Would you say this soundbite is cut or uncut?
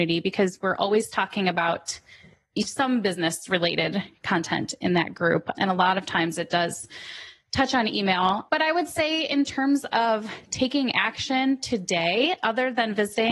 uncut